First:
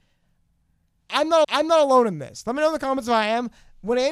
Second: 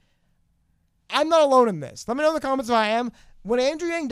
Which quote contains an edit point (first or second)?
first